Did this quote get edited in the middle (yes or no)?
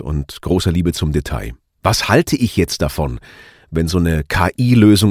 no